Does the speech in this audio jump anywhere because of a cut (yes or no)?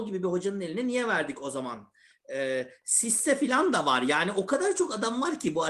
no